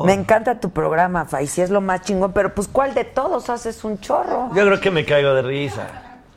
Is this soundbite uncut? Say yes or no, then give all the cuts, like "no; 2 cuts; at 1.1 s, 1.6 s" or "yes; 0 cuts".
yes; 0 cuts